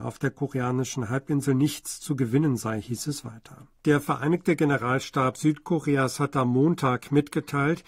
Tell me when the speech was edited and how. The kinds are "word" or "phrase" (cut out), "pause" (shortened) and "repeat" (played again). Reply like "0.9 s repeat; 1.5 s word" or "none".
3.8 s pause